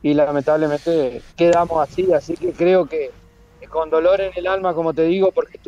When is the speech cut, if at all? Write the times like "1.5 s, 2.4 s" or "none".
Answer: 1.3 s